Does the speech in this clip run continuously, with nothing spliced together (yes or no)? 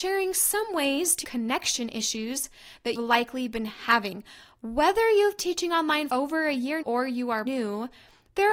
no